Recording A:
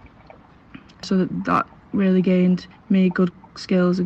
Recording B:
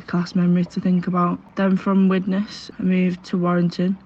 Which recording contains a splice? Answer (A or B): A